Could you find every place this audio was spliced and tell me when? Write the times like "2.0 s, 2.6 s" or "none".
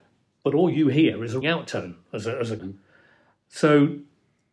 1.4 s, 2.6 s